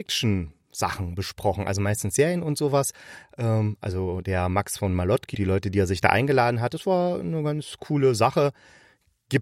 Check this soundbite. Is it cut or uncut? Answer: cut